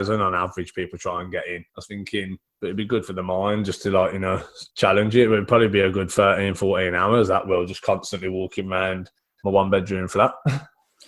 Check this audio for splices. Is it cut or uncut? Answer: cut